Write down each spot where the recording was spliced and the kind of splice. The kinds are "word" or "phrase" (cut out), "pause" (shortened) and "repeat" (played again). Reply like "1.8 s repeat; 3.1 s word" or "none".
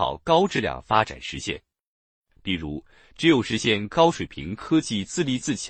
none